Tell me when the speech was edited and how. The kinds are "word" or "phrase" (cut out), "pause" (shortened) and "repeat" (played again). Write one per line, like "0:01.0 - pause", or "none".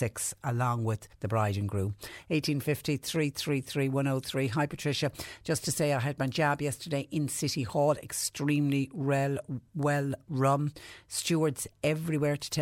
0:01.1 - pause